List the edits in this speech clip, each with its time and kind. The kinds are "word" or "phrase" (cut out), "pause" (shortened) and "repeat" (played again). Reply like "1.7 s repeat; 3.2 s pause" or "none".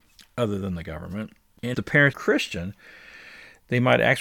1.7 s word; 2.1 s word